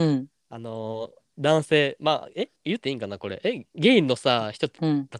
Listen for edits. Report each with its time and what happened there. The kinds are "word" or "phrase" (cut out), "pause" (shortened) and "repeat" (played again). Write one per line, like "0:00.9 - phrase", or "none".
0:02.6 - pause